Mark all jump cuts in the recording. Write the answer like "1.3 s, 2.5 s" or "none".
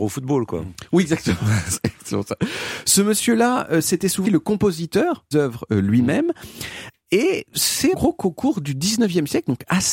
4.2 s, 5.3 s, 7.9 s